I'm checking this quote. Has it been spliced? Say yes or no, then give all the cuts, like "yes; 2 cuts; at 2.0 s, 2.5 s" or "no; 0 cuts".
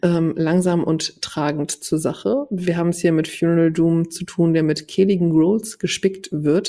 no; 0 cuts